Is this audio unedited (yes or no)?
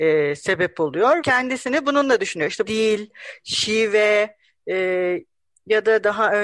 no